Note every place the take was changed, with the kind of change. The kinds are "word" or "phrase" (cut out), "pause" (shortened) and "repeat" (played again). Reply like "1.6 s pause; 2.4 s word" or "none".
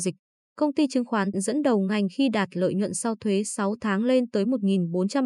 1.3 s phrase

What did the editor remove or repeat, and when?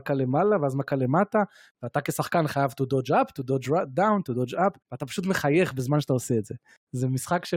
4.8 s pause

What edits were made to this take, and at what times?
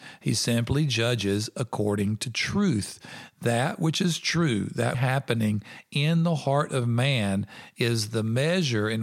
4.9 s phrase

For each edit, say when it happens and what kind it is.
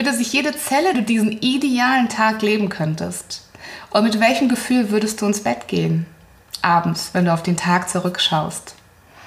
0.9 s phrase

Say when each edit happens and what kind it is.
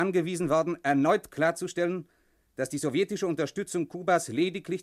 none

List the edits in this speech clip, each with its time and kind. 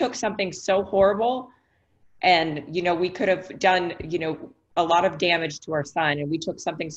none

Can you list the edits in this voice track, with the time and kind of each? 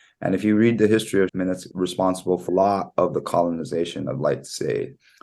1.3 s word; 1.7 s word; 2.5 s word

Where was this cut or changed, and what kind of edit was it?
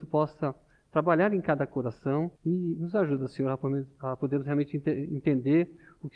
2.4 s pause

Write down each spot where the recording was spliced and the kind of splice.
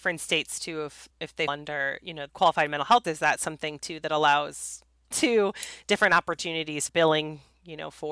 1.1 s word; 1.5 s word; 2.3 s word; 3.0 s word; 5.1 s word; 6.9 s word

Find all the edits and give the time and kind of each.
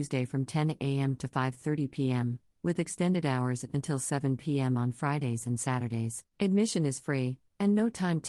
6.3 s pause

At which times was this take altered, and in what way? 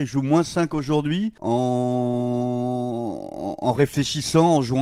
1.4 s pause

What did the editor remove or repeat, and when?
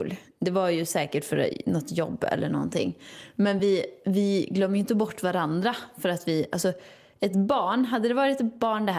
none

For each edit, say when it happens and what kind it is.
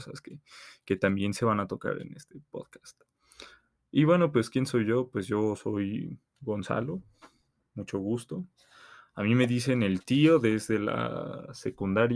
none

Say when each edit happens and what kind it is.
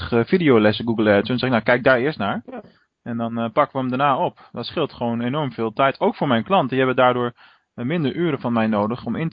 none

